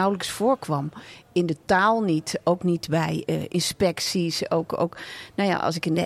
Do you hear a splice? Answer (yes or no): no